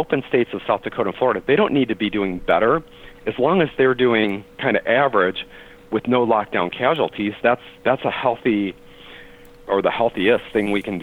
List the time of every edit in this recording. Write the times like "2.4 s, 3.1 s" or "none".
4.5 s, 7.8 s